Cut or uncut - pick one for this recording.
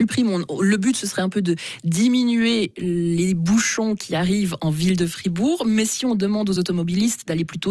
uncut